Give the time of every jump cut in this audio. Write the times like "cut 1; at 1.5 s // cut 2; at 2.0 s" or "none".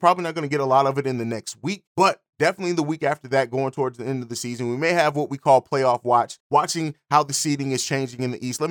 cut 1; at 1.9 s // cut 2; at 6.4 s